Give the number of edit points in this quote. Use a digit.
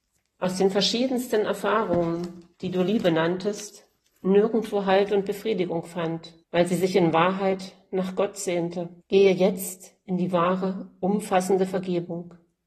4